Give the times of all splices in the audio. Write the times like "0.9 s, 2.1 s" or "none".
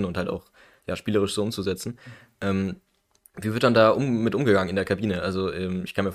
none